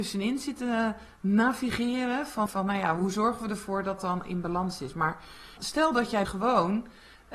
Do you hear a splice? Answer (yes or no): yes